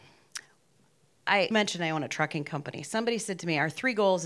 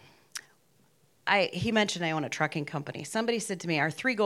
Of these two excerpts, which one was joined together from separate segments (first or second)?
first